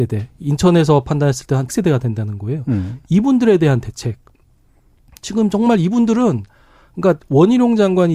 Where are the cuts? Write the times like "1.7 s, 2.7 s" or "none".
1.7 s